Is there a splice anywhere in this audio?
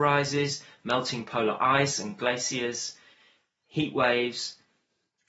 no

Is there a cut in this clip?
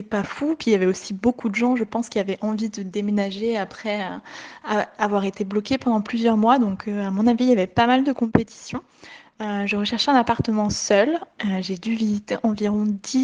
no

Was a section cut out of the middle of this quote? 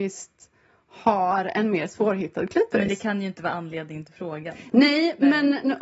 no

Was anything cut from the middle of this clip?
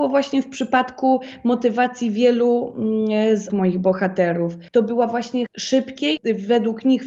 yes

